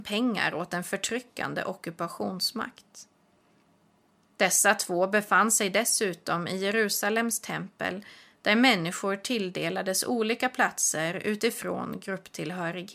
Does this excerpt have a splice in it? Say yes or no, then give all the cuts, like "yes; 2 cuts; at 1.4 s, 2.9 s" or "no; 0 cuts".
no; 0 cuts